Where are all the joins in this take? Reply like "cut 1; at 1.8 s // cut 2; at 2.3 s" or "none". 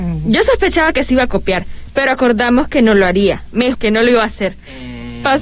cut 1; at 3.7 s